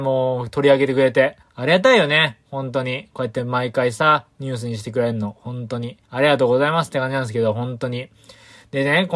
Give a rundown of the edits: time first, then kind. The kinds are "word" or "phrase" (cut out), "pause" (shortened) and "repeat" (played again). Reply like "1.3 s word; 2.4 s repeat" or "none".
1.4 s pause; 6.0 s pause